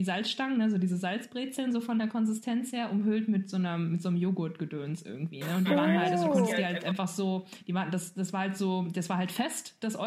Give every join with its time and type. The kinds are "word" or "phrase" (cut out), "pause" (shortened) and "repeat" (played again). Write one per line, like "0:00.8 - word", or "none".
none